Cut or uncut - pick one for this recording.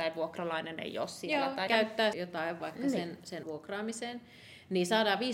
cut